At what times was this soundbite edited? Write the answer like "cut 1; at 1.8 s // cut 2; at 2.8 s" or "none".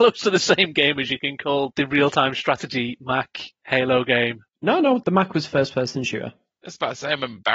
cut 1; at 1.7 s // cut 2; at 5.0 s